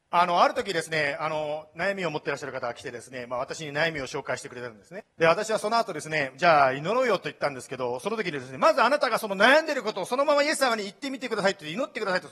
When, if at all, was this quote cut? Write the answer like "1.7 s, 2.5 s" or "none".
5.1 s